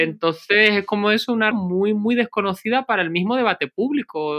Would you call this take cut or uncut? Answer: cut